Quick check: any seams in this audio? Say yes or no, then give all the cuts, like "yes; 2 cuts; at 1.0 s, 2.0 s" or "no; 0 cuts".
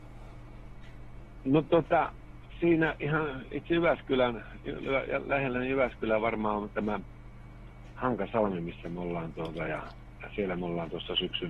no; 0 cuts